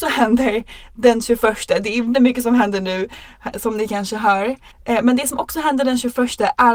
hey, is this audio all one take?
no; 3 cuts; at 2.1 s, 3.5 s, 4.7 s

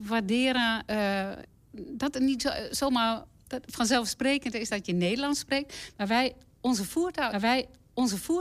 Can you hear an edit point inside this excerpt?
yes; 1 cut; at 7.3 s

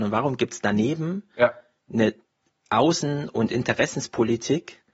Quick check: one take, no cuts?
yes; 0 cuts

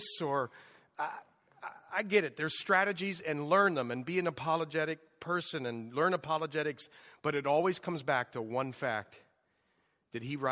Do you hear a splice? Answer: no; 0 cuts

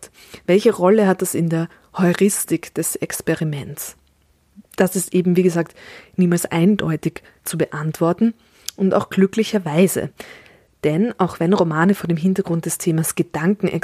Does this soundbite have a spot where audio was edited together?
yes; 1 cut; at 4.7 s

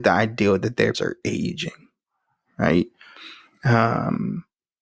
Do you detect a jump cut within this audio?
yes; 1 cut; at 0.9 s

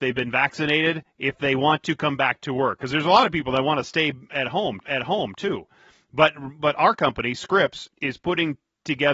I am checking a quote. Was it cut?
yes; 2 cuts; at 4.8 s, 7.9 s

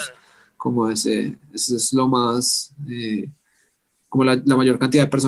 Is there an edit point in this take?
no; 0 cuts

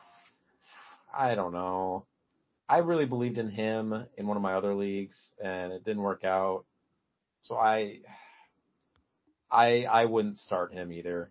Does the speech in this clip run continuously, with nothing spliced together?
yes; 0 cuts

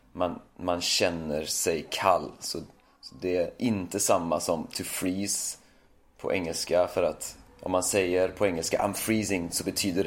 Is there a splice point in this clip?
no; 0 cuts

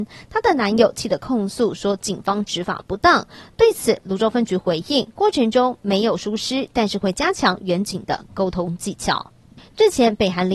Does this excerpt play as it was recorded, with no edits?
yes; 0 cuts

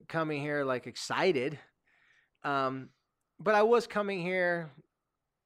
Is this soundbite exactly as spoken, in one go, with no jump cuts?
yes; 0 cuts

